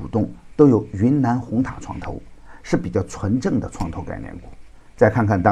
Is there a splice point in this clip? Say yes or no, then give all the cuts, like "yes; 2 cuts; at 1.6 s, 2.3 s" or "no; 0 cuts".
no; 0 cuts